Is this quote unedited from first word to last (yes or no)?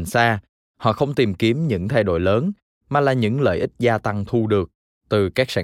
yes